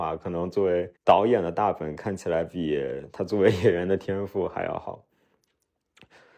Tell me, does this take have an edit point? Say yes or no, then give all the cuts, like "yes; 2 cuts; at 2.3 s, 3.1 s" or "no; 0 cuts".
yes; 1 cut; at 1.0 s